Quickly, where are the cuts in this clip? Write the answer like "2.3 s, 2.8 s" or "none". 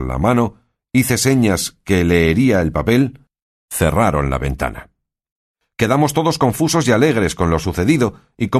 none